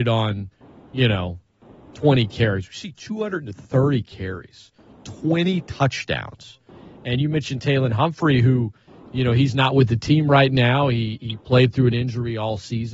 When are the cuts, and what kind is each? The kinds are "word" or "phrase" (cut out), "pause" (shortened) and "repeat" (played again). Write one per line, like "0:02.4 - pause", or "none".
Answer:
none